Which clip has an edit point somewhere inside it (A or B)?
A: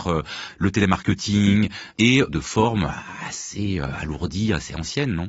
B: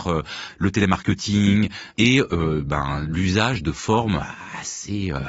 A